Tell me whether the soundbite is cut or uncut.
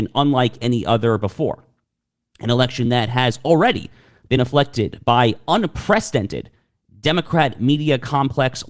uncut